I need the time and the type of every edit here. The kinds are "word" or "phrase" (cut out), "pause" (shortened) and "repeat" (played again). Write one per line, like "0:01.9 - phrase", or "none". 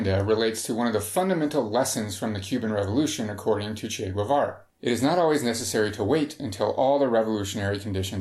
none